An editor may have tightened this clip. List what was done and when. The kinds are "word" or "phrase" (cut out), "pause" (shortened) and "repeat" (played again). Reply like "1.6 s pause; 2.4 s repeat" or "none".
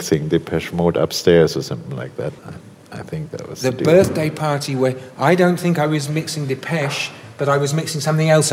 2.4 s pause